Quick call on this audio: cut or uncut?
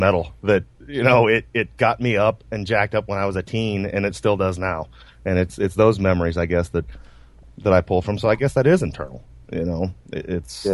uncut